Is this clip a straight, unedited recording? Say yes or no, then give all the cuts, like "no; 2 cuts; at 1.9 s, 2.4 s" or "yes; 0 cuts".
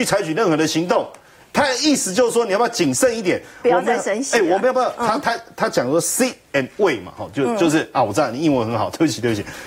yes; 0 cuts